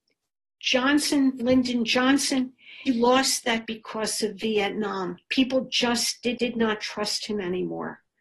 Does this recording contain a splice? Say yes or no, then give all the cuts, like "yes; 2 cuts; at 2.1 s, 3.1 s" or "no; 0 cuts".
yes; 5 cuts; at 1.4 s, 2.9 s, 3.6 s, 5.2 s, 6.4 s